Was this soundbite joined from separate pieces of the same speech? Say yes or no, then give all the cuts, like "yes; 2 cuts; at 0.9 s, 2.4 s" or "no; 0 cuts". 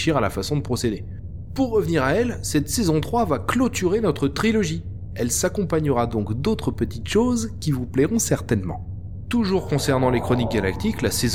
no; 0 cuts